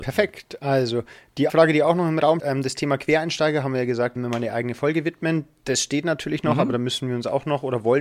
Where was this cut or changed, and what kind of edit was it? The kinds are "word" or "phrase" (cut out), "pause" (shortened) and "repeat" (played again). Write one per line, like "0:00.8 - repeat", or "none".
0:01.5 - word
0:02.4 - word
0:04.2 - word